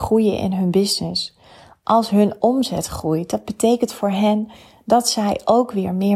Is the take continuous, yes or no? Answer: yes